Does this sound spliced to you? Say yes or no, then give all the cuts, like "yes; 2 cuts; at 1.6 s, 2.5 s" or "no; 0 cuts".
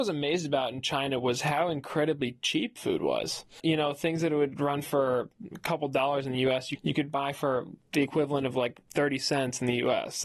no; 0 cuts